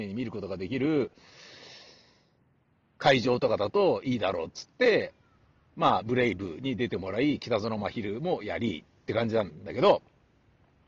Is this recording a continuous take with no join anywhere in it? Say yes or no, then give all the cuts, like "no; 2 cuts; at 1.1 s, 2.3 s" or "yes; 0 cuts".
yes; 0 cuts